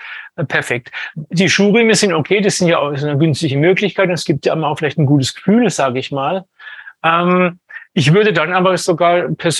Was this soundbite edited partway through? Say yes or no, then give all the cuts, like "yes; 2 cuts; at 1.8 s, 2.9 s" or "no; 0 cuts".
no; 0 cuts